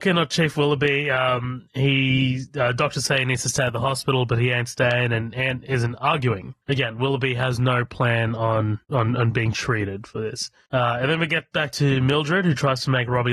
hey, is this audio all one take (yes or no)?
no